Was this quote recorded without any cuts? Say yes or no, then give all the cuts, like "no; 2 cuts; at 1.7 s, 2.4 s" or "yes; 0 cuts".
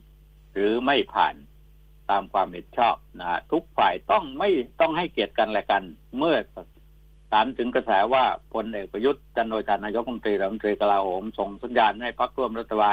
yes; 0 cuts